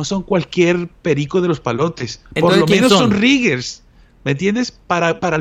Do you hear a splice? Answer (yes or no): no